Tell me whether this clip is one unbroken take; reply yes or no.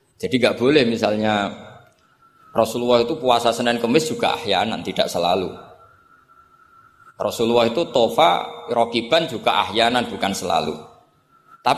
yes